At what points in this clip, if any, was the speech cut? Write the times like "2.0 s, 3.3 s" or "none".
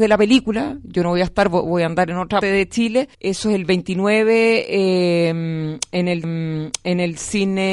2.4 s, 3.1 s, 6.2 s